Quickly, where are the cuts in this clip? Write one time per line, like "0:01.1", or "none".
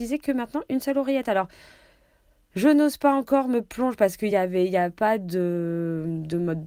none